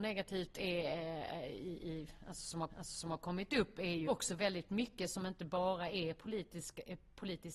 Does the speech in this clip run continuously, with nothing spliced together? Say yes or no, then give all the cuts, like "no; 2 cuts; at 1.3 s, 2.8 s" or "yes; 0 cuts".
no; 2 cuts; at 2.7 s, 4.1 s